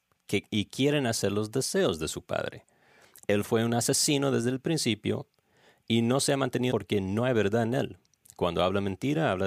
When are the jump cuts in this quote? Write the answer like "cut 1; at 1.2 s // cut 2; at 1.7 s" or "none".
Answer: cut 1; at 6.7 s